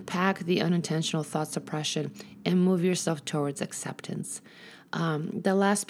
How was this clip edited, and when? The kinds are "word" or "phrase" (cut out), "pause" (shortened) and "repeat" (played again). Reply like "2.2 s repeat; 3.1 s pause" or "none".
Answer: none